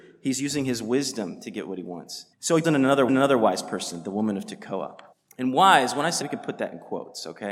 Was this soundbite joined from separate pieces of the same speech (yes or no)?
yes